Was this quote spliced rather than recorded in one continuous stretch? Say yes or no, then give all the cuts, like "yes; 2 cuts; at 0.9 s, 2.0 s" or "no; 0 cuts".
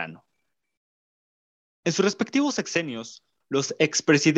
no; 0 cuts